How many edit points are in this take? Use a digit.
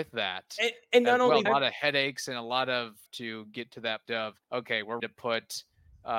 5